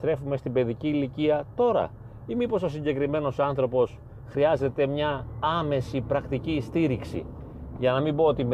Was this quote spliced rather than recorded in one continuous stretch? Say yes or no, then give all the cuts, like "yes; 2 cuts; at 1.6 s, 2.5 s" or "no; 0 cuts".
no; 0 cuts